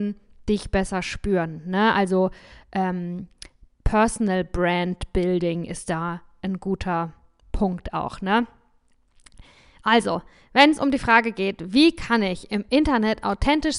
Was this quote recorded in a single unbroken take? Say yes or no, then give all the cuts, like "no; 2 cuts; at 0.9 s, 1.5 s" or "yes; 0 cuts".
yes; 0 cuts